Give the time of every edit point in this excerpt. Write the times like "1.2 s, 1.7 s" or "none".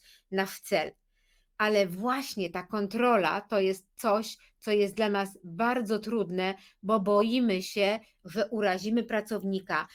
none